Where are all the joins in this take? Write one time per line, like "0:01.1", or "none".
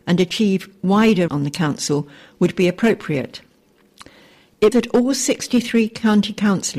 0:01.3
0:04.7